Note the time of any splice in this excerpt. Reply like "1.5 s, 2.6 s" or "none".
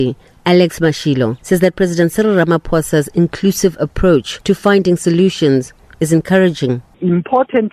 none